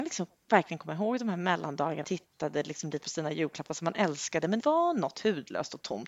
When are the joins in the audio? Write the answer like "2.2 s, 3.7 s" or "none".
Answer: 2.0 s, 3.0 s, 4.6 s